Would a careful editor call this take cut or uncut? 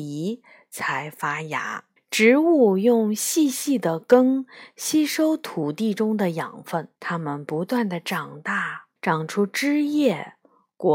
cut